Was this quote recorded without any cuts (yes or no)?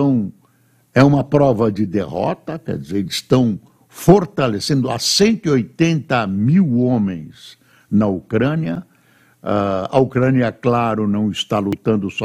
yes